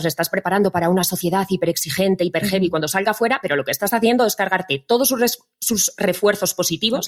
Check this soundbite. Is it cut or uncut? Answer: uncut